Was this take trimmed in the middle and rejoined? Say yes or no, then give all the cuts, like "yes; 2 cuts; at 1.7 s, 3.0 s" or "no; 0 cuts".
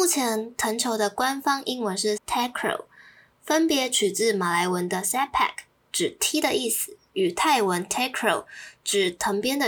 yes; 1 cut; at 2.2 s